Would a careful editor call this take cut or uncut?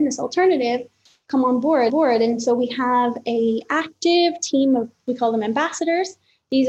cut